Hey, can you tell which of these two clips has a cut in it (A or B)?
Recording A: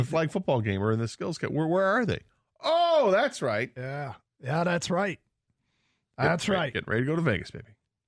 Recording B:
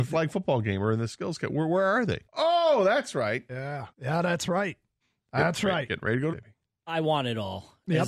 B